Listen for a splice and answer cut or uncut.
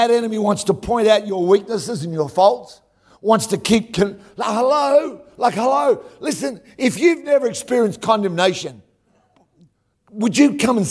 uncut